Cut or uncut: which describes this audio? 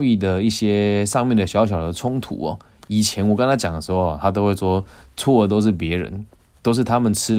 uncut